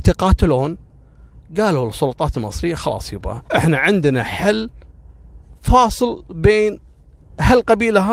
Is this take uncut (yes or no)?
no